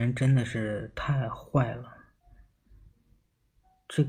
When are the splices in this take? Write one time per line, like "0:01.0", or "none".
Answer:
none